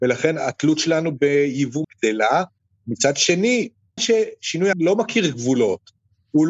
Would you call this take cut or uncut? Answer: cut